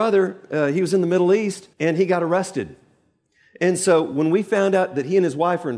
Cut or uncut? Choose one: cut